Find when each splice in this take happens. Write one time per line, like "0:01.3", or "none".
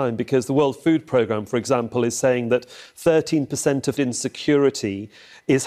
0:04.0